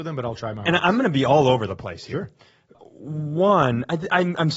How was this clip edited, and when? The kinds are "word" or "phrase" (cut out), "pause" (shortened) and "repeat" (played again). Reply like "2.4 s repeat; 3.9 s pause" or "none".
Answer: 2.7 s word